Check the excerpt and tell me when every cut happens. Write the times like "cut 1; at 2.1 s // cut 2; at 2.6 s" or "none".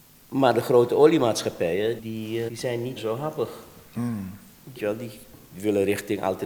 cut 1; at 2.0 s // cut 2; at 2.5 s // cut 3; at 3.0 s // cut 4; at 4.8 s